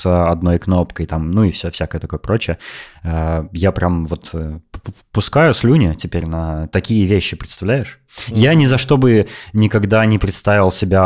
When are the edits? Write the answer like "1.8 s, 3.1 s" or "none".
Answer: none